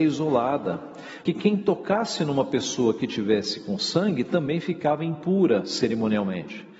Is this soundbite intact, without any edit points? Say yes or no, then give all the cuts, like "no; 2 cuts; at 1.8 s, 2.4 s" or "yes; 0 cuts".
no; 1 cut; at 1.3 s